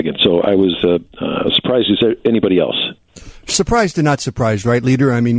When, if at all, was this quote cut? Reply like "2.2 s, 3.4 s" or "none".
none